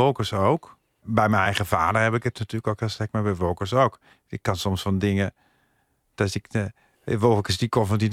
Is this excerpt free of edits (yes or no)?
yes